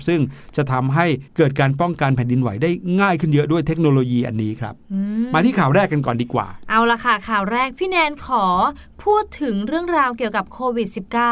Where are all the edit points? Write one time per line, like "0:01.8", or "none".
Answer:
0:01.3